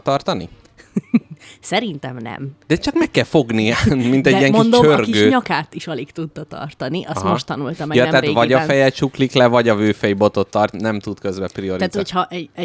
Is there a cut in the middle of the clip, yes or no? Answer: yes